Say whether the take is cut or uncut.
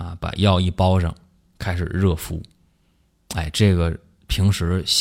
uncut